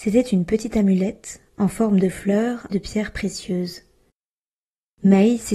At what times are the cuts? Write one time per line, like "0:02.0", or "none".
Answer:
0:02.7